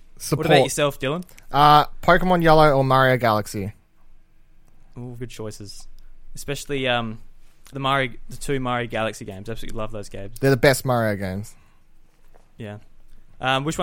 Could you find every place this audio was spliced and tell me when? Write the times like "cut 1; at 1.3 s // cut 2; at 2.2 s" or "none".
cut 1; at 5.2 s // cut 2; at 7.7 s